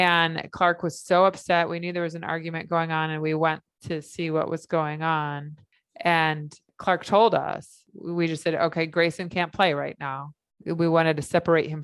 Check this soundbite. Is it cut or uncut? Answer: uncut